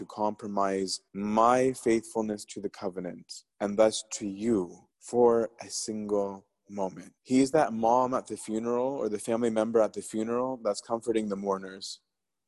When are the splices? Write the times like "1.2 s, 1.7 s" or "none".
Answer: 1.1 s, 3.5 s, 4.9 s, 7.2 s